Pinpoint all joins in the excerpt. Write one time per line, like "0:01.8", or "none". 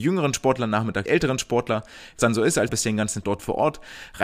0:01.1
0:02.2
0:02.7
0:03.2